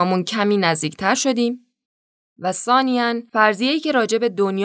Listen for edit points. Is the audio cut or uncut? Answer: uncut